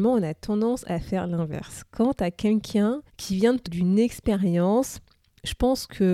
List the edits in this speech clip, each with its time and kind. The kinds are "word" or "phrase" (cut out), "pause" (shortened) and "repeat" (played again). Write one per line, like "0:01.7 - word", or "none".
0:03.1 - pause
0:03.6 - phrase